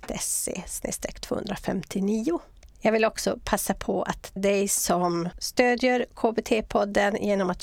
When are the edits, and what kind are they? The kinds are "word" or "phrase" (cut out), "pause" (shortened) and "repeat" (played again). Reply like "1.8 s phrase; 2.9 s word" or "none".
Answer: 4.4 s word